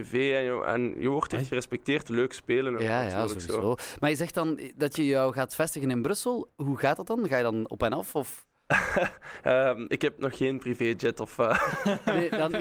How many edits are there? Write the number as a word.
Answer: one